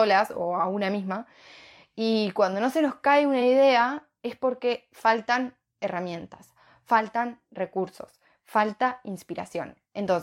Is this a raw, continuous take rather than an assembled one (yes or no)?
yes